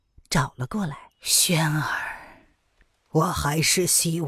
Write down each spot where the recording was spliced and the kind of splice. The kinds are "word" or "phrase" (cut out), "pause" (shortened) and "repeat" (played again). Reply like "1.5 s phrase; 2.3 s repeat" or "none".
1.1 s pause